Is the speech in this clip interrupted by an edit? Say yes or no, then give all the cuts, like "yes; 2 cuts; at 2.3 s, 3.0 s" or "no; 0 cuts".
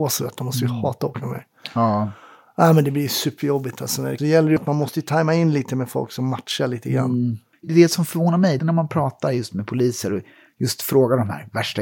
yes; 4 cuts; at 4.2 s, 4.6 s, 7.5 s, 8.6 s